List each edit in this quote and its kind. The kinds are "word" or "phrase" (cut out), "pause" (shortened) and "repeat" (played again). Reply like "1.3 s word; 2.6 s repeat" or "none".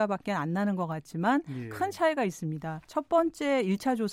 2.8 s pause